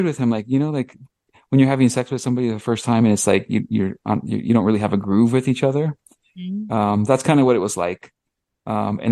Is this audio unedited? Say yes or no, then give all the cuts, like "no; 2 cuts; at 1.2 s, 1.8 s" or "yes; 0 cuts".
yes; 0 cuts